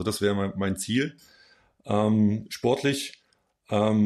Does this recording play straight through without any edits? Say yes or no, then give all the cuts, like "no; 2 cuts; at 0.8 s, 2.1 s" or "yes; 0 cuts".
yes; 0 cuts